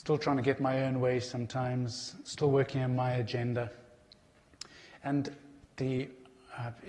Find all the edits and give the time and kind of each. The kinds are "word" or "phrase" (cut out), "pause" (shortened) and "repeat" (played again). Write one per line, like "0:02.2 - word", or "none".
0:05.6 - pause